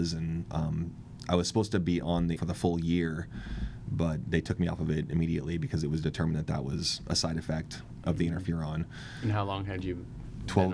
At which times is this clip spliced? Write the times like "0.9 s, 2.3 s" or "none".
2.4 s